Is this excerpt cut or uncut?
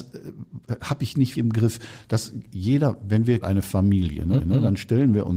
cut